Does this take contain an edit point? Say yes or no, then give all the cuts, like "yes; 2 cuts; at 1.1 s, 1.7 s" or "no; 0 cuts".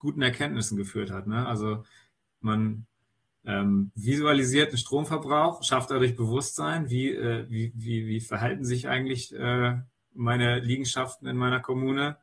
no; 0 cuts